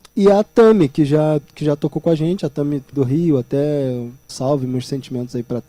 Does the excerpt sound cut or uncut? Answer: cut